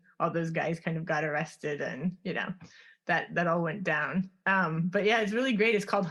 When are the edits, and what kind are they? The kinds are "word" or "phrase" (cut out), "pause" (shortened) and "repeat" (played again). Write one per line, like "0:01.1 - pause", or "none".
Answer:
none